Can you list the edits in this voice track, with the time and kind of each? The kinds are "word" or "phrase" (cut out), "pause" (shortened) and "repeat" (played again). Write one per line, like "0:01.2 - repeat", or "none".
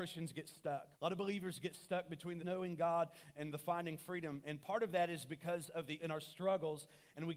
0:00.9 - pause
0:02.4 - word
0:03.3 - word
0:06.0 - word